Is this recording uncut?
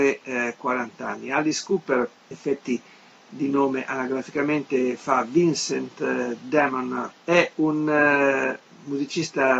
no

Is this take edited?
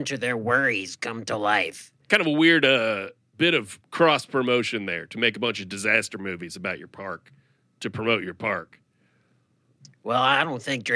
no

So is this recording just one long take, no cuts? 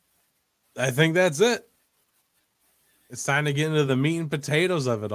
yes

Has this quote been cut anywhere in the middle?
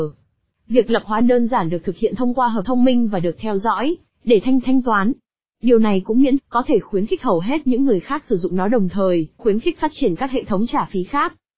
yes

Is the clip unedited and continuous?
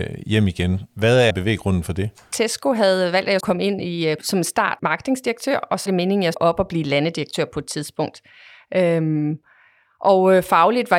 no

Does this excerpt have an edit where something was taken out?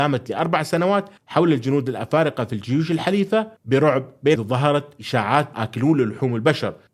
yes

